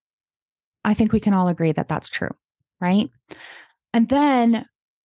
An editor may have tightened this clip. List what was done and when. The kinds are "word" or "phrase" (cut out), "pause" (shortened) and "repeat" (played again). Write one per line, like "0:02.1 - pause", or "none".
none